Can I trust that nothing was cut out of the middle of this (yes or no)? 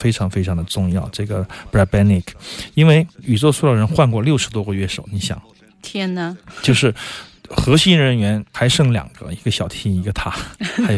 yes